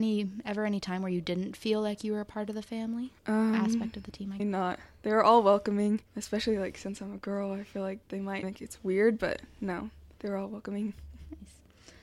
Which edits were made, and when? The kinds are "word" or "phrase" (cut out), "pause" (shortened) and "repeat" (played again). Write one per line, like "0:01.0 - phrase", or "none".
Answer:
0:03.2 - pause
0:04.4 - phrase
0:06.1 - pause
0:08.0 - pause
0:08.4 - word
0:10.1 - pause